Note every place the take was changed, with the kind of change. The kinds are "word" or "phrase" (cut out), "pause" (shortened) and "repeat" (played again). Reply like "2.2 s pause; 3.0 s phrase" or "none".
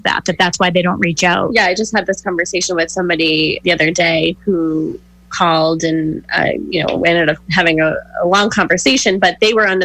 3.6 s word